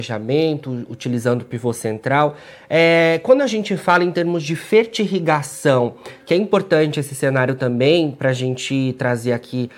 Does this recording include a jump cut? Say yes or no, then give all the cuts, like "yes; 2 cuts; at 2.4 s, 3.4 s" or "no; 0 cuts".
no; 0 cuts